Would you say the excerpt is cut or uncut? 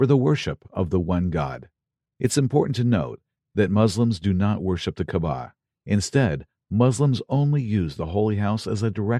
uncut